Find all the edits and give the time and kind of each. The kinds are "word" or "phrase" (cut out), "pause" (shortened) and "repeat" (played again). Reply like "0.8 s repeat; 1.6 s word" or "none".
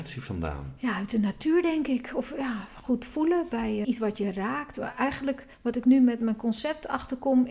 3.8 s word; 5.5 s pause